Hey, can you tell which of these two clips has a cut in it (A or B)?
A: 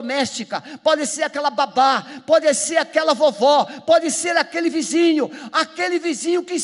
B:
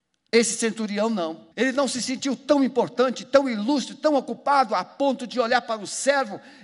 B